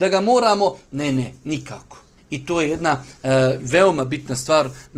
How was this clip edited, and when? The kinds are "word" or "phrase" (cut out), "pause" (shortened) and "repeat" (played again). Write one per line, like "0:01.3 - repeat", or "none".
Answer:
0:02.2 - pause